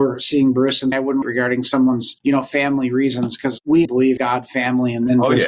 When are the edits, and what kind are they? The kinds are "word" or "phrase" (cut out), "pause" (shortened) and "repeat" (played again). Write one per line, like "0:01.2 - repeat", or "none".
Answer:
0:00.9 - word
0:01.2 - phrase
0:02.2 - pause
0:03.8 - word
0:04.2 - word